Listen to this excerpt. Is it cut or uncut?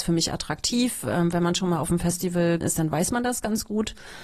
cut